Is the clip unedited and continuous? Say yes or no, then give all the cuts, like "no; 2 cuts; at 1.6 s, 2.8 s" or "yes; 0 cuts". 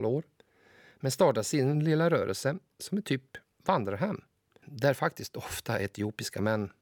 yes; 0 cuts